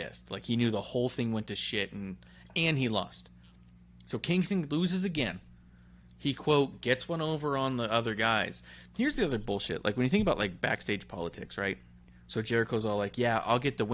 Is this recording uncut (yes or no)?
yes